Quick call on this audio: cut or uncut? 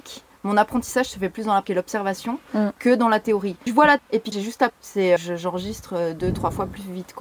cut